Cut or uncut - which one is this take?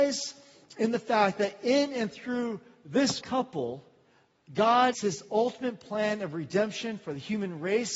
cut